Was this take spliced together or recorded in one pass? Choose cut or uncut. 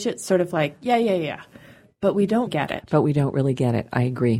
cut